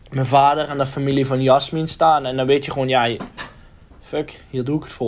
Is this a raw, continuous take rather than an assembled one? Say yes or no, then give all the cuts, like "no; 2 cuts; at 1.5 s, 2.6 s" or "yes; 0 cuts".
yes; 0 cuts